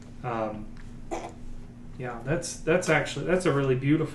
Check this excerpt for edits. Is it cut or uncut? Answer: uncut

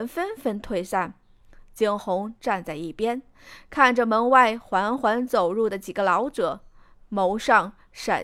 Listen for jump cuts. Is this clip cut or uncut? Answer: uncut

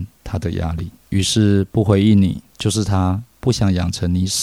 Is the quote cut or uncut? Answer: cut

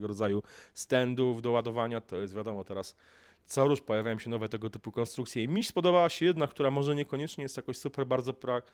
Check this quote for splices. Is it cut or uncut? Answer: uncut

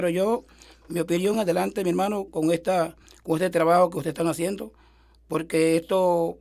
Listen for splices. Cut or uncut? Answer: cut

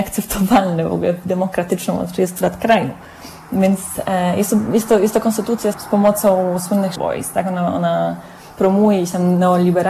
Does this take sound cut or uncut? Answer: cut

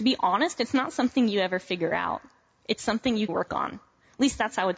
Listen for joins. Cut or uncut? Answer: cut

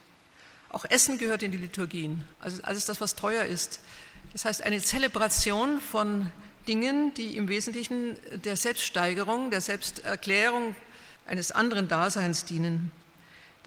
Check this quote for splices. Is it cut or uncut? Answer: cut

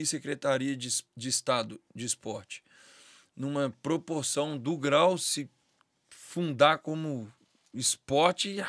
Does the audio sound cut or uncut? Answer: uncut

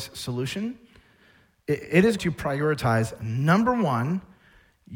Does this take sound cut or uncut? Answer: cut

